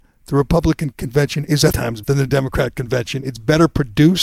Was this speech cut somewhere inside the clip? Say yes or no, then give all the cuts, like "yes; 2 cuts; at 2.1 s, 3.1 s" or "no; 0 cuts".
yes; 2 cuts; at 1.7 s, 2.0 s